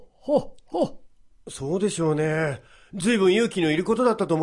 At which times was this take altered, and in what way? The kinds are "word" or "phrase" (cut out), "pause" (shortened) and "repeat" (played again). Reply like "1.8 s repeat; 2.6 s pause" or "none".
none